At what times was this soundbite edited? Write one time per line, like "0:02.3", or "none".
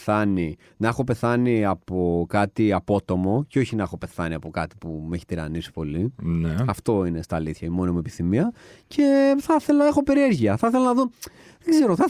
none